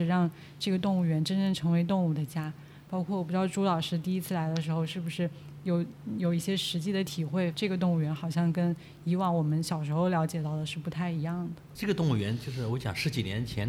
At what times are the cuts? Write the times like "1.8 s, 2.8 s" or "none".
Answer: 7.5 s